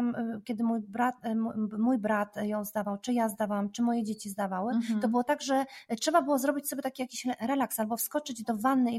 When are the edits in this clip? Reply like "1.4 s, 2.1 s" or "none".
none